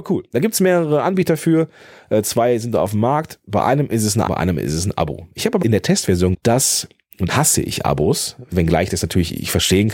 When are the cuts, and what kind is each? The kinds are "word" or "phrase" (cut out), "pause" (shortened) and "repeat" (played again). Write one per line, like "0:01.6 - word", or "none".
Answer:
0:04.3 - word
0:05.6 - word
0:06.3 - word
0:07.3 - word